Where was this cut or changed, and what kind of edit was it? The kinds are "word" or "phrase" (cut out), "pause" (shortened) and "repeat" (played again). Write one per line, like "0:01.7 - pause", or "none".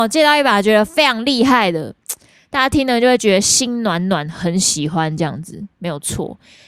none